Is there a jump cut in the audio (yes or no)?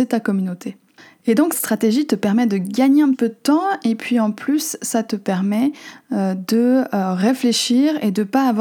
yes